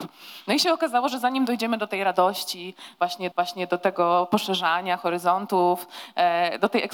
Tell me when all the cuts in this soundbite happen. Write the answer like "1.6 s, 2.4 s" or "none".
3.3 s